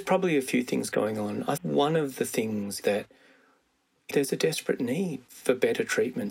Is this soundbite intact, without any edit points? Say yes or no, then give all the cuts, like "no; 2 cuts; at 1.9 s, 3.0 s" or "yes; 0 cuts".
no; 4 cuts; at 1.6 s, 2.8 s, 4.1 s, 5.3 s